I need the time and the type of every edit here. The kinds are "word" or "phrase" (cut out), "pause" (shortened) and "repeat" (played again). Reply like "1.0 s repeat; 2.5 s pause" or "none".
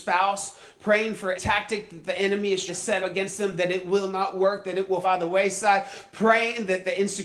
1.3 s word; 2.7 s word; 3.0 s word; 5.0 s word